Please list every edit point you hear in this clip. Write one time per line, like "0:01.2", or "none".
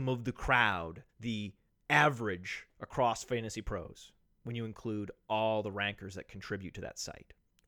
0:01.1